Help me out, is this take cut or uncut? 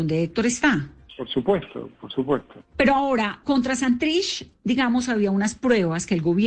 cut